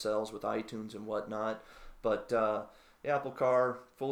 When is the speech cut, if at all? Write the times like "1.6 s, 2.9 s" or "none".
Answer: none